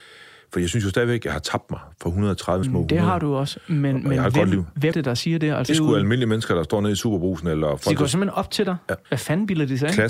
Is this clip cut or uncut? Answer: cut